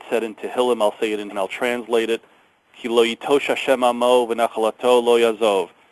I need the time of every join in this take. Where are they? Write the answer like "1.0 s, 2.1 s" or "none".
1.3 s